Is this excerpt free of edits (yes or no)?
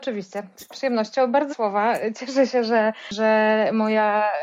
no